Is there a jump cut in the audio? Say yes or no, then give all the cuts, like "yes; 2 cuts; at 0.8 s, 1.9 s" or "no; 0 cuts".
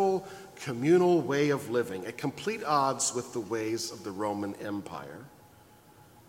no; 0 cuts